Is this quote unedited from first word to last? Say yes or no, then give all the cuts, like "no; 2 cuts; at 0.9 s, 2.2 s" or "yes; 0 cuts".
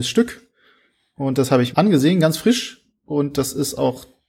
no; 1 cut; at 1.7 s